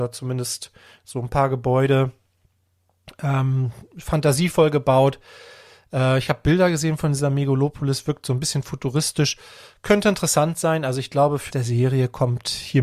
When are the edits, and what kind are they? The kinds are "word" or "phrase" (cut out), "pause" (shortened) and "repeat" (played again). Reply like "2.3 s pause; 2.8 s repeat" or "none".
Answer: 11.5 s word